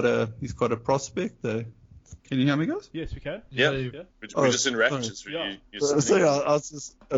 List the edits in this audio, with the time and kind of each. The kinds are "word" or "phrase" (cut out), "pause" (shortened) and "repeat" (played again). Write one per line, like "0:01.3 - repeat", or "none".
0:02.2 - pause
0:04.1 - pause